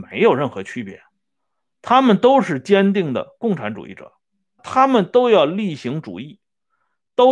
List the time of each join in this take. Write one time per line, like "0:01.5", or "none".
0:04.6